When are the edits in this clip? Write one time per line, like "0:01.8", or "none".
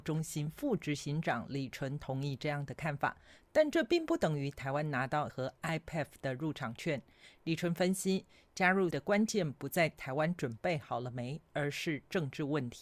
0:05.3
0:08.9